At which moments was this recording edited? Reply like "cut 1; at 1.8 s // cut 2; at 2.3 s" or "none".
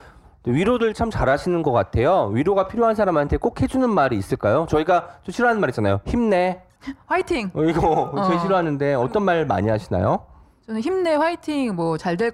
none